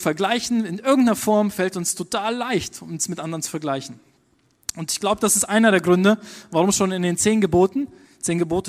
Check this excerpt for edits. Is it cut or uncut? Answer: uncut